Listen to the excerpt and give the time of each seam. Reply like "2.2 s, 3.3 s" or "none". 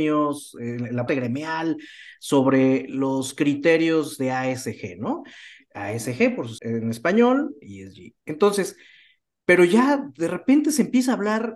1.1 s, 6.6 s, 7.6 s